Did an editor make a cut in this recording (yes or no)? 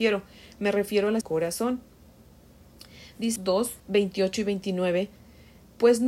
yes